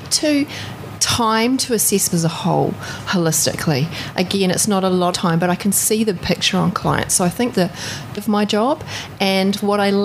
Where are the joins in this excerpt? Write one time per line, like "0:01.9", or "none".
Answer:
0:02.1
0:05.1
0:06.2
0:07.5
0:08.2